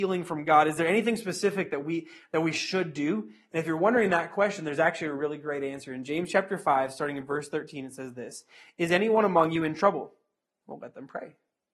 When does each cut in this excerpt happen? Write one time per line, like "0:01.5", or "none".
none